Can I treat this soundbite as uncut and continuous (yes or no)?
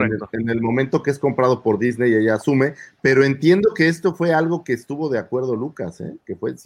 yes